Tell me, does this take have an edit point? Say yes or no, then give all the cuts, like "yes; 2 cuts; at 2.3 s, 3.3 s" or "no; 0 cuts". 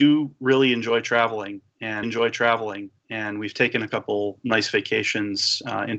yes; 1 cut; at 2.0 s